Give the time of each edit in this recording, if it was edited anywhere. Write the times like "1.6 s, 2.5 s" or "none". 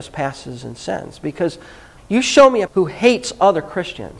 2.0 s, 2.7 s

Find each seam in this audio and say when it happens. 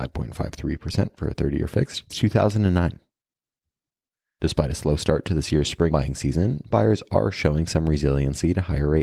2.1 s, 5.9 s, 6.7 s

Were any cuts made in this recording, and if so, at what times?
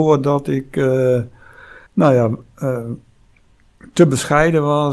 1.9 s

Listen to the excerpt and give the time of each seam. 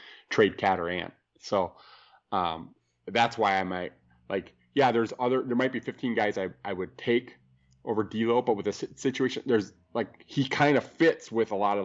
none

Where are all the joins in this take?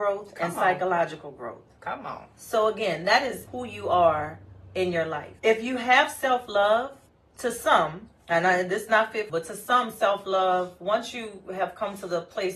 3.5 s, 5.4 s, 7.1 s, 8.2 s, 8.9 s, 9.3 s

